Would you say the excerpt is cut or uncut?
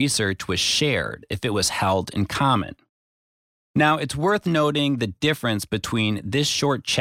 uncut